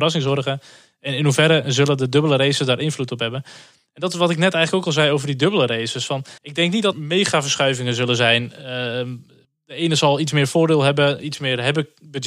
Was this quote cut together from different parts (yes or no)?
yes